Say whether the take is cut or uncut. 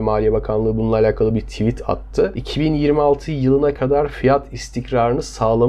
uncut